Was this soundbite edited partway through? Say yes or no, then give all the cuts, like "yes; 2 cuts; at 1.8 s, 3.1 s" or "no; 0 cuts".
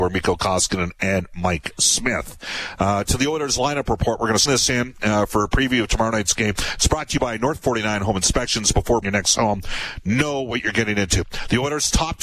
yes; 2 cuts; at 4.5 s, 9.0 s